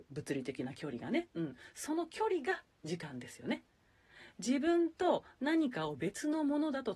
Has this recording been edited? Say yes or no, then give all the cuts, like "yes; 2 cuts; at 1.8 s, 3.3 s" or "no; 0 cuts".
no; 0 cuts